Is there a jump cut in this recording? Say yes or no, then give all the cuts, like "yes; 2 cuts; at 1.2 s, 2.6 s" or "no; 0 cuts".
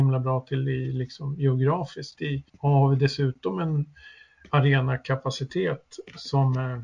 yes; 2 cuts; at 2.1 s, 2.5 s